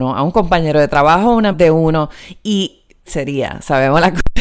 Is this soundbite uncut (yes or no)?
no